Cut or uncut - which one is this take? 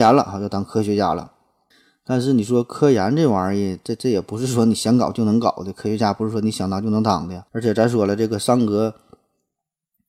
cut